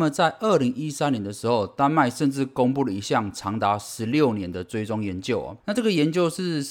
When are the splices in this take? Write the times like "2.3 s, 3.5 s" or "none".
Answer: 5.6 s